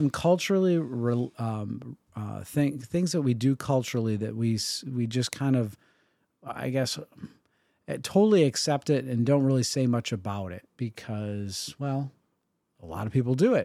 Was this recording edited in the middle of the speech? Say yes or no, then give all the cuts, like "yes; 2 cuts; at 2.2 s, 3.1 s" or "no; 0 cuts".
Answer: no; 0 cuts